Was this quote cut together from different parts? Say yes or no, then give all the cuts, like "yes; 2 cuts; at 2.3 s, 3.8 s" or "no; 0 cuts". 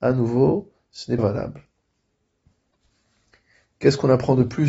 yes; 1 cut; at 1.2 s